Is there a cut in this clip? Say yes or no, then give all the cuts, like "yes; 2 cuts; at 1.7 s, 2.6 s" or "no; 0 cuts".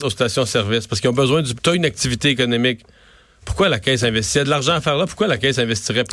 yes; 1 cut; at 1.5 s